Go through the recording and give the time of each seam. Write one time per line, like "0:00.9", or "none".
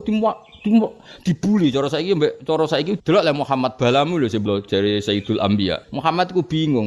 0:03.0
0:04.5
0:05.8